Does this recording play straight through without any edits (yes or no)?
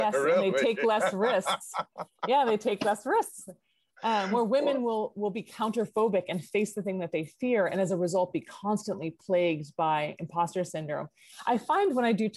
yes